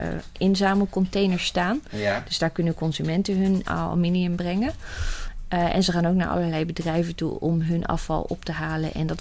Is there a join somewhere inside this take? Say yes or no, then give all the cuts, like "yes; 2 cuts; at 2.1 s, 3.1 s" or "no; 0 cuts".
yes; 1 cut; at 3.6 s